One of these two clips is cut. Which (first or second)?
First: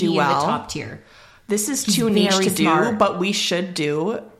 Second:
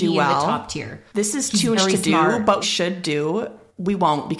second